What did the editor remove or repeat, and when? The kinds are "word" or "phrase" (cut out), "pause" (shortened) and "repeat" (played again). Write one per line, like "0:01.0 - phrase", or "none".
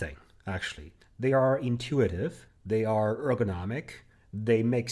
none